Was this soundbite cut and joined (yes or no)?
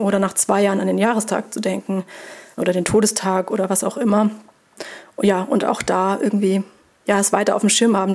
no